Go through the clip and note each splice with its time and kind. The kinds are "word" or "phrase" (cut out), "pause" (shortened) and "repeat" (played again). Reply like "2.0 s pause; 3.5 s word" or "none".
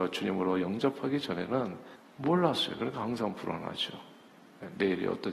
2.0 s pause